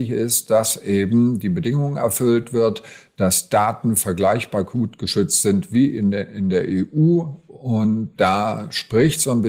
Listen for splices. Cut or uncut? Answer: uncut